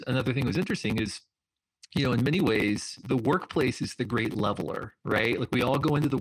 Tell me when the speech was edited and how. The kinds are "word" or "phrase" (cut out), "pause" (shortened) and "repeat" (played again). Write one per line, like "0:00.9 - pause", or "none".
none